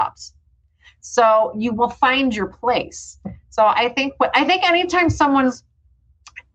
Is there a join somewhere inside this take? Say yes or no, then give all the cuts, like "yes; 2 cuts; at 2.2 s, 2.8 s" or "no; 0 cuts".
no; 0 cuts